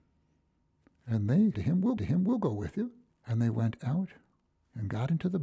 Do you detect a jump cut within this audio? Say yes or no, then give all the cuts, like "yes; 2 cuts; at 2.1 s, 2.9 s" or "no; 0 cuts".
yes; 3 cuts; at 1.5 s, 2.0 s, 3.1 s